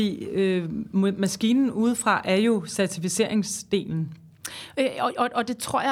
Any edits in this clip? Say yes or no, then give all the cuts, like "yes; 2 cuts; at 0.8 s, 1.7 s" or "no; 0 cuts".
no; 0 cuts